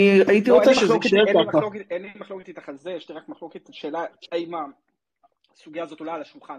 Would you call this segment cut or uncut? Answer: uncut